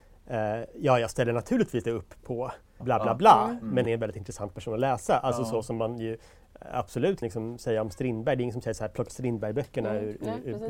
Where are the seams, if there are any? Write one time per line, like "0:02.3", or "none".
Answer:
0:01.8
0:02.8
0:03.9
0:07.2
0:09.1